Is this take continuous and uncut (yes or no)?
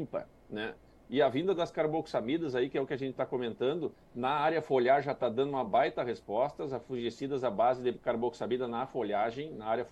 yes